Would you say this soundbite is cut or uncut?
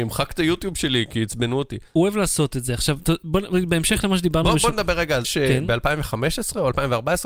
cut